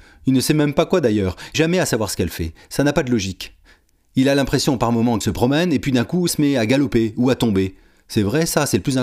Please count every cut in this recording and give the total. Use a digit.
3